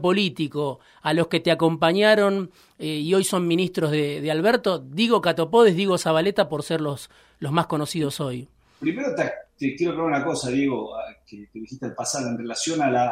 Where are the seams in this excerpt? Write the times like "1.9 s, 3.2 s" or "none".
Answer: none